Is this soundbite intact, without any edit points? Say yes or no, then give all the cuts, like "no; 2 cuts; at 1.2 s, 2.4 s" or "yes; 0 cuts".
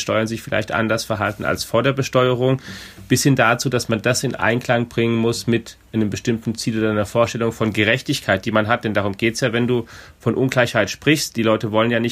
yes; 0 cuts